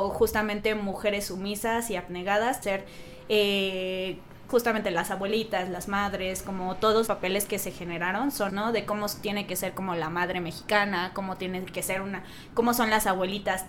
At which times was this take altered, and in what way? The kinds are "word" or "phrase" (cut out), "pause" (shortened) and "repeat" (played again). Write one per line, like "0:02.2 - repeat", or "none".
0:02.6 - word
0:04.5 - word
0:07.1 - word
0:08.5 - word